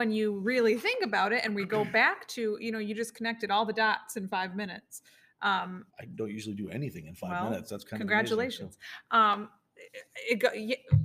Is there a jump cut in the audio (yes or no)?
yes